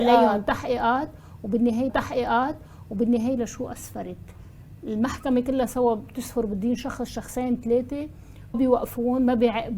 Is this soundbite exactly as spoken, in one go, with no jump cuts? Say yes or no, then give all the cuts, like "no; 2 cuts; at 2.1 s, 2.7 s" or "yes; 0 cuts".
no; 2 cuts; at 1.9 s, 8.5 s